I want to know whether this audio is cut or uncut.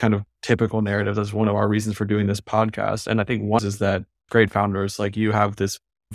cut